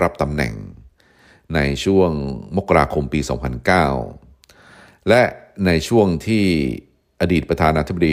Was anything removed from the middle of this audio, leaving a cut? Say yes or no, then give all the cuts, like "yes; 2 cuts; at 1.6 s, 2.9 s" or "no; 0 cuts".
no; 0 cuts